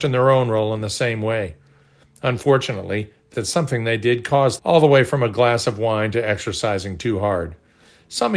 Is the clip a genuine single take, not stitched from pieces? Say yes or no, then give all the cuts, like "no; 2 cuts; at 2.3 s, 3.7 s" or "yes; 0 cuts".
no; 2 cuts; at 3.3 s, 4.6 s